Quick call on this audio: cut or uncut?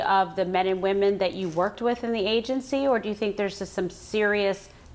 uncut